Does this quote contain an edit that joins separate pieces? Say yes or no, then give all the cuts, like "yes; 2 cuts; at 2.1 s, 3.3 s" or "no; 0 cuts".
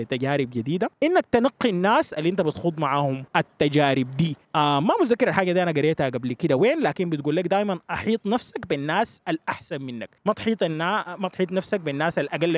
yes; 4 cuts; at 0.9 s, 3.3 s, 4.4 s, 10.2 s